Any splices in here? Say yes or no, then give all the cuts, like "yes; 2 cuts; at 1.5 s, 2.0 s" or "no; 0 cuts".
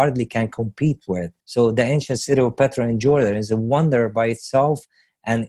yes; 1 cut; at 1.4 s